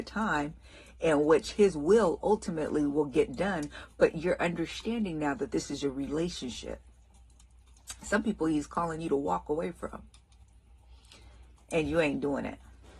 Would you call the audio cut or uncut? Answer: uncut